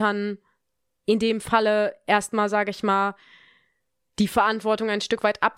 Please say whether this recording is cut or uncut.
uncut